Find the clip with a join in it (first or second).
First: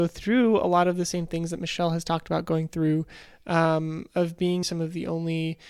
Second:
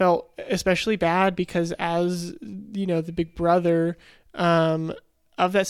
first